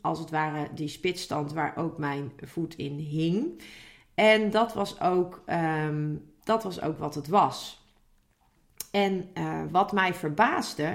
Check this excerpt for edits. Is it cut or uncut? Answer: uncut